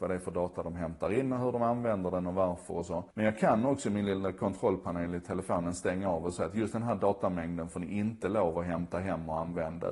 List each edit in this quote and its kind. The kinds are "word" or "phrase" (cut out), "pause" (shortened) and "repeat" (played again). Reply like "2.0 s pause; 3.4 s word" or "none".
3.1 s pause